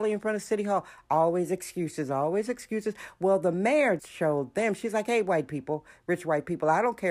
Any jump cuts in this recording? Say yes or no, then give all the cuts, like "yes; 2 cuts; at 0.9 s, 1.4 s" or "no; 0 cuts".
yes; 1 cut; at 4.0 s